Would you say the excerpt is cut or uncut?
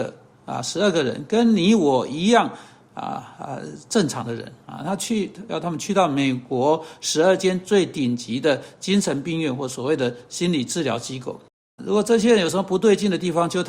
cut